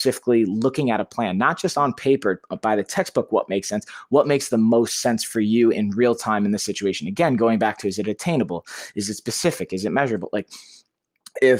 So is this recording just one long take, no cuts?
yes; 0 cuts

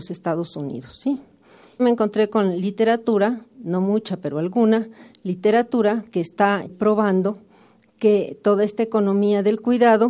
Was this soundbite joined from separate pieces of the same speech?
no; 0 cuts

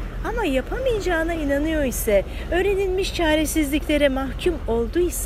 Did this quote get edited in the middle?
no; 0 cuts

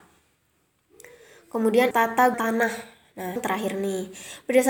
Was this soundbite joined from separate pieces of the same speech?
yes; 3 cuts; at 1.9 s, 2.3 s, 3.4 s

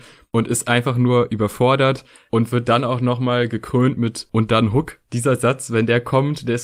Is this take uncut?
yes; 0 cuts

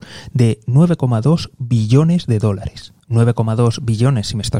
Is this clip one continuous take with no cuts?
yes; 0 cuts

